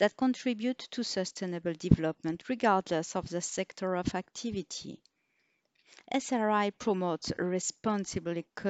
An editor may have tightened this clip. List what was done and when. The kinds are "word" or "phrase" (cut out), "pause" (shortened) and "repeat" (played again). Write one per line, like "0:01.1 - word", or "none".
none